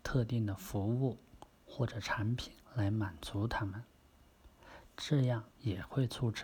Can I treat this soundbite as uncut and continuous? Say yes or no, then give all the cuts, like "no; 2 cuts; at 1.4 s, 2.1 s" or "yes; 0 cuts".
no; 2 cuts; at 2.6 s, 5.5 s